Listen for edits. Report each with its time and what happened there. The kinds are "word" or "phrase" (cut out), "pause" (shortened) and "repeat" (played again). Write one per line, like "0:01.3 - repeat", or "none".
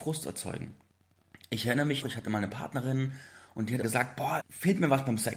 0:02.0 - word
0:03.8 - word
0:04.4 - word